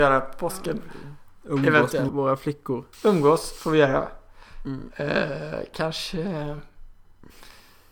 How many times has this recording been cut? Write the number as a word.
two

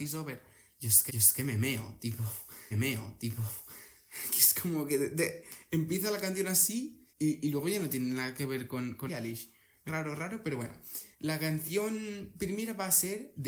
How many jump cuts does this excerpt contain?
six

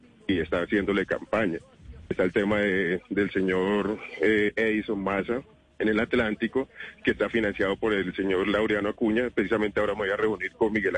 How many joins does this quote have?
one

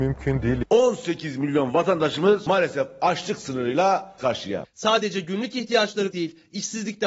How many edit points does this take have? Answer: two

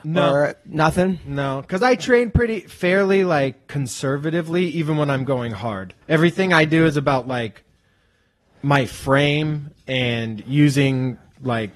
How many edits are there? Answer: one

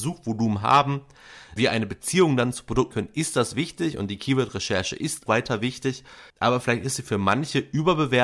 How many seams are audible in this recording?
four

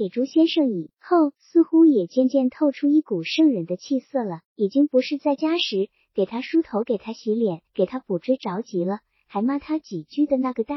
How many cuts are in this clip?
two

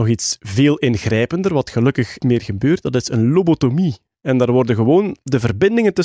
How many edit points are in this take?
one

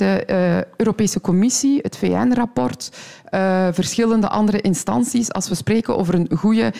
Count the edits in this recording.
zero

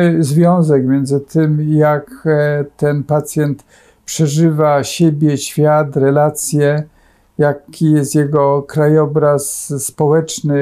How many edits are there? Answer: zero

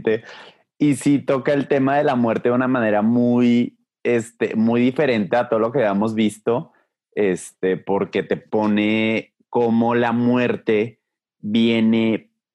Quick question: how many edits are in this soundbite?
zero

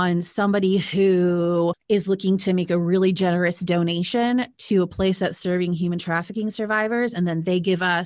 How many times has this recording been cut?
zero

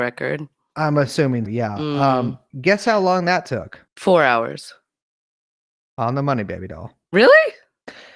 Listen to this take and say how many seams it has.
two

